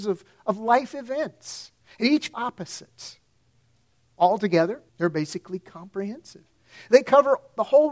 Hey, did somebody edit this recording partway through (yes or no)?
yes